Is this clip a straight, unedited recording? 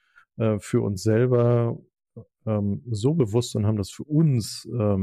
yes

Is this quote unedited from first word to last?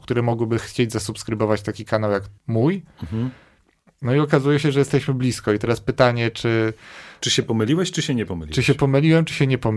no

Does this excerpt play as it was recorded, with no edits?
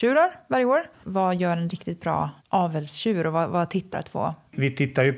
no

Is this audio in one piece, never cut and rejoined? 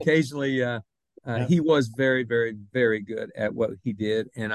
yes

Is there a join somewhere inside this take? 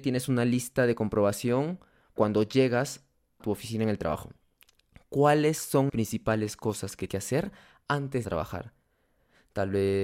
yes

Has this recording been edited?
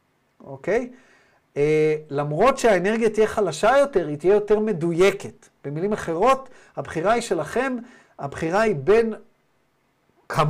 no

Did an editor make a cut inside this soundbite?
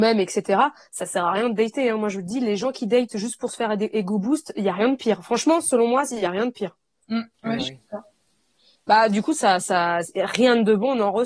no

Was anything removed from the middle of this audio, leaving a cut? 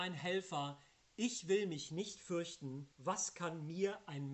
yes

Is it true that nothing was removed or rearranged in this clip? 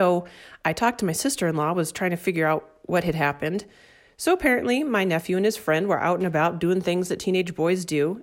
yes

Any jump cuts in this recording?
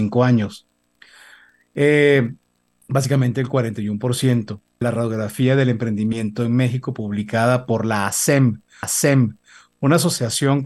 yes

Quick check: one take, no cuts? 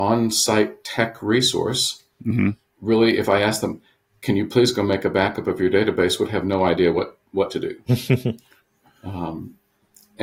yes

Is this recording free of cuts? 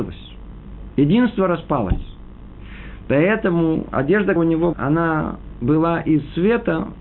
no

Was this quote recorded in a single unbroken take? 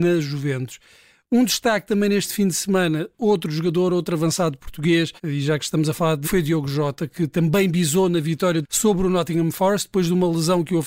no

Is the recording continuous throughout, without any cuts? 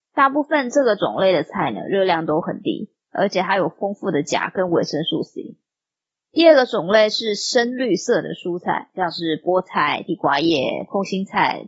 yes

